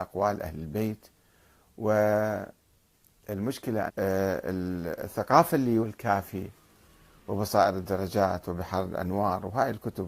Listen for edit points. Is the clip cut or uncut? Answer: cut